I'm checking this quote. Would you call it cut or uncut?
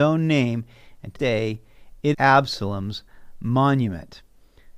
cut